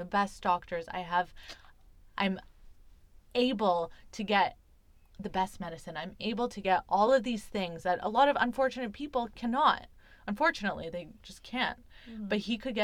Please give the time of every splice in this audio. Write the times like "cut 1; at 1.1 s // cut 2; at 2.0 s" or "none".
none